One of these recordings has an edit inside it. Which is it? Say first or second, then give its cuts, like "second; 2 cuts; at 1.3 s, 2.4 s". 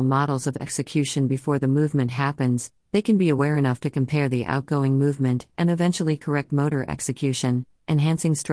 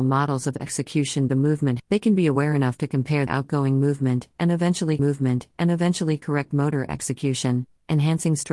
second; 4 cuts; at 1.3 s, 1.8 s, 3.3 s, 5.0 s